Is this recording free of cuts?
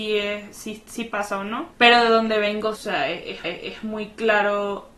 no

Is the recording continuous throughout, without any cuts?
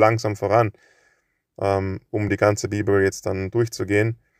yes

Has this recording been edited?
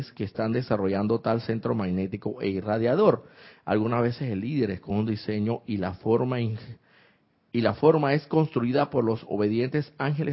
no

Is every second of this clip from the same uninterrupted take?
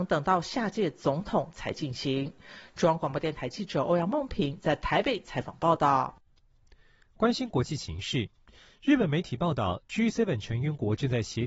yes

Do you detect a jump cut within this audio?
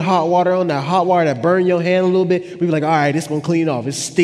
no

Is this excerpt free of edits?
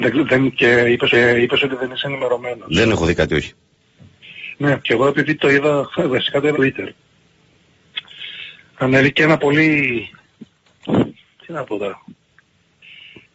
no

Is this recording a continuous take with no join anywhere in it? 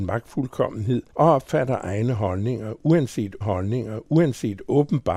no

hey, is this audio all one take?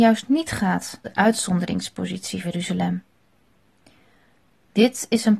no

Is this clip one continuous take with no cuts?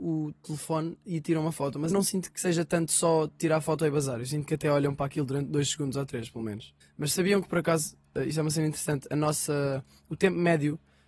no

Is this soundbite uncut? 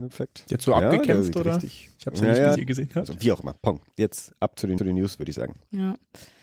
no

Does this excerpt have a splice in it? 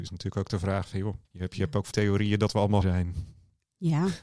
yes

